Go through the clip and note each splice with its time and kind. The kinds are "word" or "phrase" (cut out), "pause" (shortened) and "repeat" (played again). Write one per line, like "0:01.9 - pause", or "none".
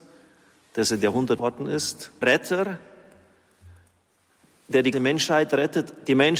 0:01.4 - word
0:02.2 - word
0:04.9 - word